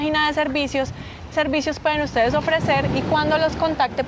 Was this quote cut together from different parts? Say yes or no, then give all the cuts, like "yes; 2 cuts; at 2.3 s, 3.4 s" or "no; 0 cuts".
yes; 1 cut; at 1.3 s